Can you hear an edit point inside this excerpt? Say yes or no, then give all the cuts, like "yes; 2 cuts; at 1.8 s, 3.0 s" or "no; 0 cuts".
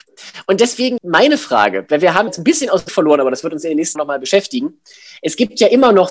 yes; 4 cuts; at 1.0 s, 2.3 s, 2.9 s, 4.0 s